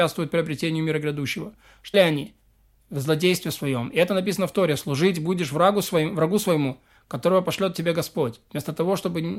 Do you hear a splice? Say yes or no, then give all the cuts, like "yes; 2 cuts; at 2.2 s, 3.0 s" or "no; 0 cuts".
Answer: yes; 1 cut; at 1.9 s